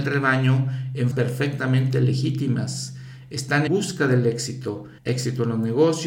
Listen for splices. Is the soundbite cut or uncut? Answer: cut